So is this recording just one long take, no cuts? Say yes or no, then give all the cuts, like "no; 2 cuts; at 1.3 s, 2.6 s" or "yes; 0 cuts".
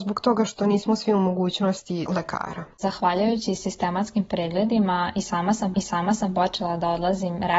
no; 3 cuts; at 2.1 s, 2.7 s, 5.7 s